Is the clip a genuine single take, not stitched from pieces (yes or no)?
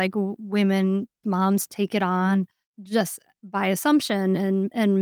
no